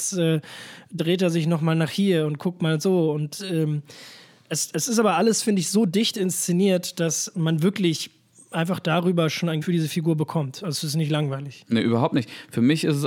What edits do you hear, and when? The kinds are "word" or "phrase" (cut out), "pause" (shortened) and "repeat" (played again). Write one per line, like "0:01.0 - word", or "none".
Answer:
0:09.6 - word